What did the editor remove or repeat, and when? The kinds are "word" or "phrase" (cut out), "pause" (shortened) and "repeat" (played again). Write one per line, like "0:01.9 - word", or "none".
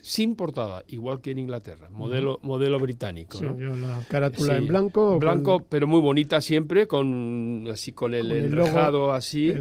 none